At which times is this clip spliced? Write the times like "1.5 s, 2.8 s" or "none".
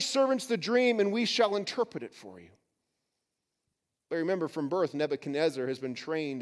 none

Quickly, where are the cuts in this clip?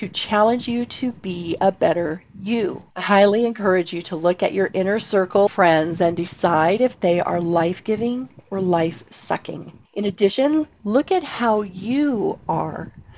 2.9 s, 5.5 s, 9.8 s

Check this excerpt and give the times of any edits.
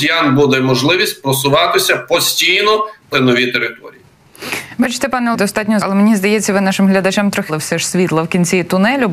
3.1 s, 5.3 s, 5.8 s, 7.5 s

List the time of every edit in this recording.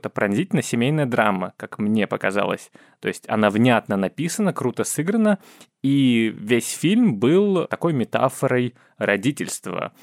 none

